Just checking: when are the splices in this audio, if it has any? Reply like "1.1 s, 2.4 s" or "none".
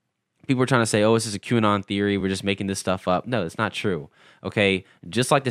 none